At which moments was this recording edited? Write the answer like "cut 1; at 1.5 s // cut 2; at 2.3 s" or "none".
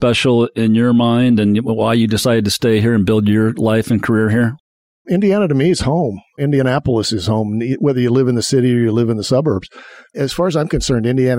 none